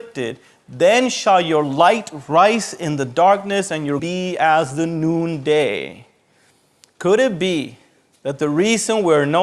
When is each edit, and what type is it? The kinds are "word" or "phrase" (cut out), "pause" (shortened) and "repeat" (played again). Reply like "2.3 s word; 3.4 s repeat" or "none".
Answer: 4.0 s word